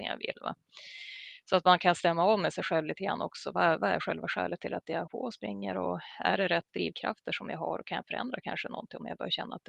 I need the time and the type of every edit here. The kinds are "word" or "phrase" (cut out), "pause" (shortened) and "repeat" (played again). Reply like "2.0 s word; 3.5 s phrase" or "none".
5.1 s word; 6.7 s pause